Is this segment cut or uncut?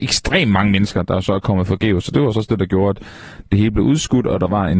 uncut